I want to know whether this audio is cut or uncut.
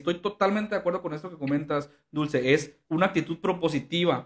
cut